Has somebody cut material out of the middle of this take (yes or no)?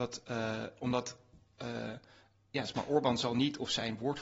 no